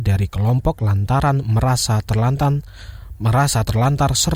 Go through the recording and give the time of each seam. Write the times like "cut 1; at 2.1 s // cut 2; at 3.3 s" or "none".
none